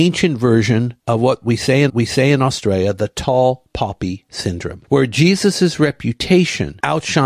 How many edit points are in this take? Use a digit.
2